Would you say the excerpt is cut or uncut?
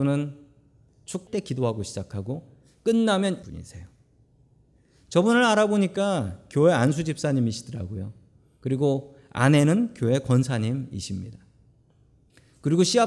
cut